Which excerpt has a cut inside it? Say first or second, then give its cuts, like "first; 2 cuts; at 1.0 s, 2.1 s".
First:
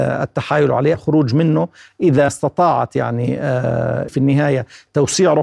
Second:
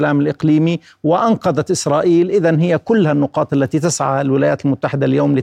first; 3 cuts; at 0.9 s, 2.3 s, 4.1 s